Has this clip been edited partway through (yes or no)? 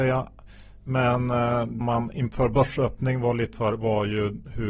yes